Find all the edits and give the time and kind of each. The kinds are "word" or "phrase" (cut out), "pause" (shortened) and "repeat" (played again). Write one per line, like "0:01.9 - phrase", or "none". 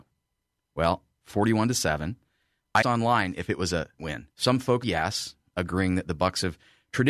0:01.2 - phrase
0:02.8 - word
0:04.0 - word
0:04.3 - pause
0:04.8 - word

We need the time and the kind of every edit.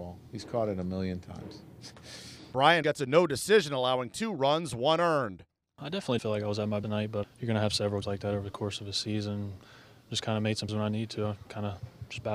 0:02.8 - word
0:06.2 - word
0:06.8 - word
0:07.2 - word
0:08.0 - word
0:10.7 - word

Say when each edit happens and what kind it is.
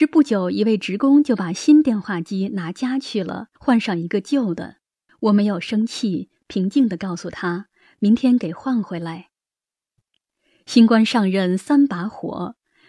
0:03.6 - pause
0:05.1 - pause

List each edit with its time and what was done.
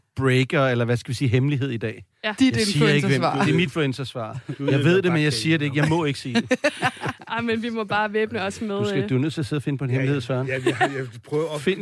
0:03.7 - word

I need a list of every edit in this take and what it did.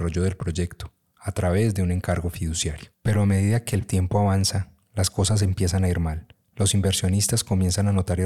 0:02.9 - pause
0:06.3 - pause

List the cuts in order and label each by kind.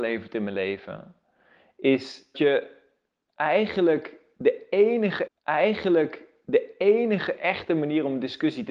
0:02.3 - word
0:05.3 - repeat

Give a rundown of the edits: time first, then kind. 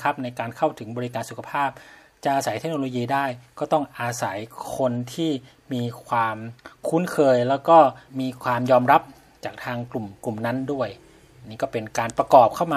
0:08.1 - pause

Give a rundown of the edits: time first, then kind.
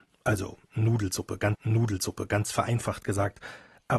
0:01.5 - repeat

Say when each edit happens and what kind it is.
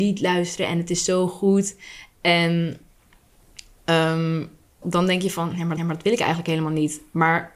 0:04.8 - word
0:05.8 - repeat

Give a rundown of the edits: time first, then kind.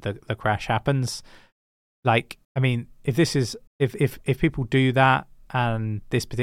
0:02.4 - pause
0:03.7 - pause

